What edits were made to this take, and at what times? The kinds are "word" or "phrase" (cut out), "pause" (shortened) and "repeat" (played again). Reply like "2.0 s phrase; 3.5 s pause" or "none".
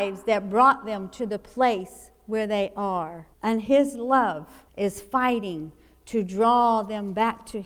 3.3 s pause; 4.7 s pause